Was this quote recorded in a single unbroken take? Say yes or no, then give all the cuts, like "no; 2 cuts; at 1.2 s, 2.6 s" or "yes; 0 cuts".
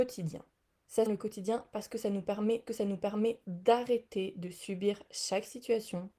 no; 2 cuts; at 1.1 s, 2.7 s